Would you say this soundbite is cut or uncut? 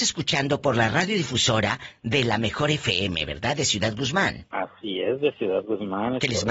uncut